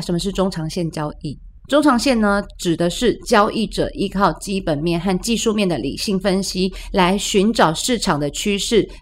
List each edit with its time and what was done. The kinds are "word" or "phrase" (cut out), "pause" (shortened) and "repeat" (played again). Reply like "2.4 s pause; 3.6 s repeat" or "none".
1.6 s pause

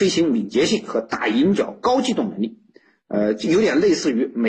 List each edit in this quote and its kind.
none

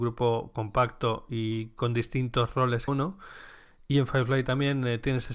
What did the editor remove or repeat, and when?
2.9 s word

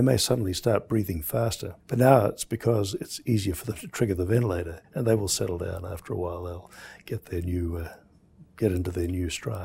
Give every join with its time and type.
1.8 s pause; 4.8 s pause

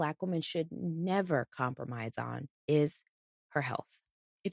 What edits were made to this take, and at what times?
2.5 s pause

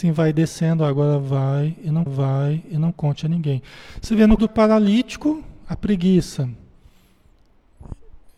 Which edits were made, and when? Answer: 2.1 s repeat; 4.4 s word

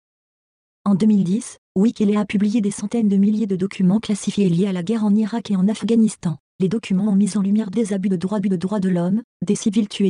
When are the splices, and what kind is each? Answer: 8.4 s repeat

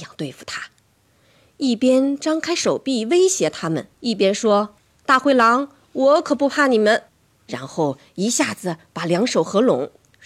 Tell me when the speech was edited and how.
3.9 s pause; 4.8 s pause; 7.1 s pause

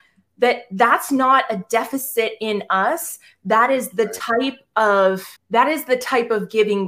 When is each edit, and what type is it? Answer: 5.4 s pause

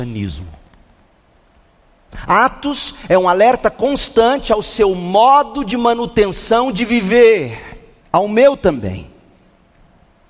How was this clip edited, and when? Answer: 8.0 s pause

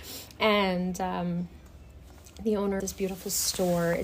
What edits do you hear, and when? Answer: 2.8 s word

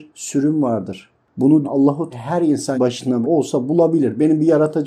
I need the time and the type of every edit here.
1.6 s word; 2.1 s word; 2.7 s word; 3.2 s word

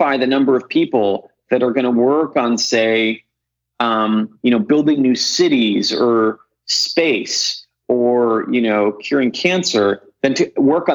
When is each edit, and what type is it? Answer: none

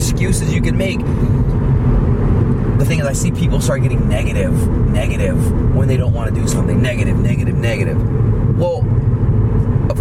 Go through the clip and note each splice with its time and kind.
2.9 s word; 4.9 s repeat

